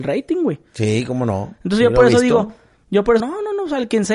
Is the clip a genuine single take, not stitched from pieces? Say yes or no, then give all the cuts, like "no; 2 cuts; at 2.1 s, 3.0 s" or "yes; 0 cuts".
no; 1 cut; at 3.2 s